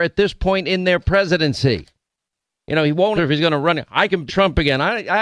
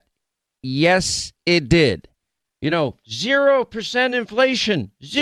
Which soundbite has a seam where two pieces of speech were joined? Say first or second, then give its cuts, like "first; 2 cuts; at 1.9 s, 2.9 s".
first; 2 cuts; at 3.2 s, 4.3 s